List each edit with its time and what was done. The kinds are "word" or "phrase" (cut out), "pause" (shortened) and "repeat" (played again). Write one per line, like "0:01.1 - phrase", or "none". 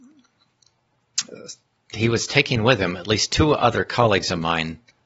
none